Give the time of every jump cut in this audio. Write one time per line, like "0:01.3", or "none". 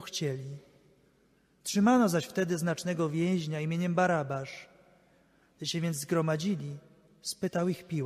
none